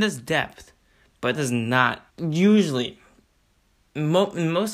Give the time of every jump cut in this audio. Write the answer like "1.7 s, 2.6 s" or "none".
1.3 s, 2.1 s